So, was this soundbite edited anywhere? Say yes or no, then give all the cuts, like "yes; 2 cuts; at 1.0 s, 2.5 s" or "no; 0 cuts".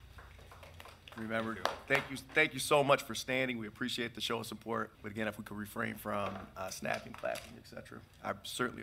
yes; 1 cut; at 4.9 s